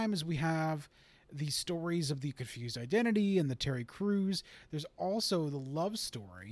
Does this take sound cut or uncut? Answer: uncut